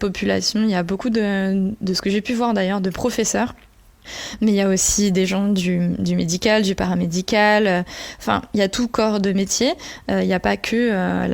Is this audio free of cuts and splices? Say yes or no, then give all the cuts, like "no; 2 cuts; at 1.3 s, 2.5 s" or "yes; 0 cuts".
yes; 0 cuts